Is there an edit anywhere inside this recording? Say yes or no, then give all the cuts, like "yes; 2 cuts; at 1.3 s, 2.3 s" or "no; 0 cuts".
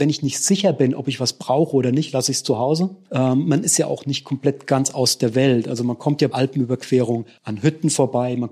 yes; 1 cut; at 6.3 s